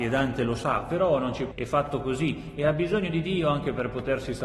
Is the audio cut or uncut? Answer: cut